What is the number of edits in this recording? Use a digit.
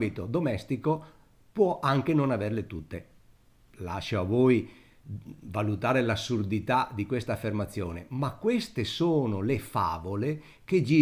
0